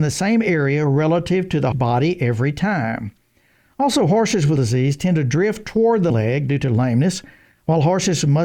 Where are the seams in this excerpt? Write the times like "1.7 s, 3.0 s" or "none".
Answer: 1.7 s, 4.6 s, 6.1 s